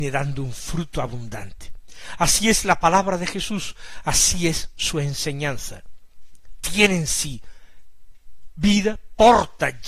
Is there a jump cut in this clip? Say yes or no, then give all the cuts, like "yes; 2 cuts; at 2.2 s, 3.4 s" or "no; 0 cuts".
no; 0 cuts